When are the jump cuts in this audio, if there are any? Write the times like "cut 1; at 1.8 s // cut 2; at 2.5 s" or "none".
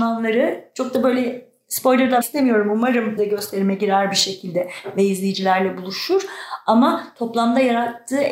cut 1; at 2.2 s // cut 2; at 3.2 s